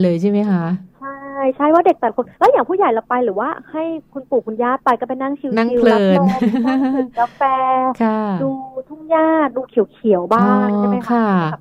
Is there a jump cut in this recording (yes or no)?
yes